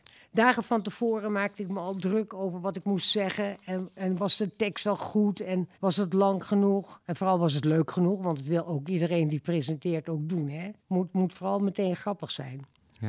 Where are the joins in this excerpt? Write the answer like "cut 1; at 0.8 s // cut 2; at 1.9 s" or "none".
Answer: cut 1; at 5.7 s // cut 2; at 10.8 s